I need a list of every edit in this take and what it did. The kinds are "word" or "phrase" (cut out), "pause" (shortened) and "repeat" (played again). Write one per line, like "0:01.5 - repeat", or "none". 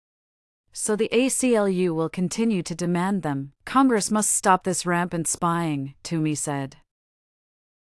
0:03.6 - pause

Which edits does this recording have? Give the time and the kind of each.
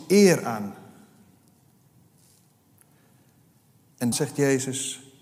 0:04.1 - word

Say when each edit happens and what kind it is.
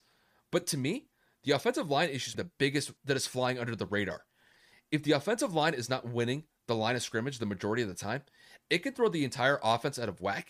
0:02.3 - word
0:03.0 - word

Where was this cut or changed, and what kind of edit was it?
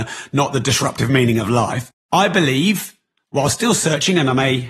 0:02.0 - pause

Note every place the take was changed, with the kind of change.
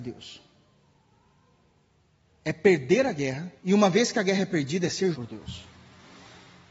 0:03.6 - pause
0:05.1 - word

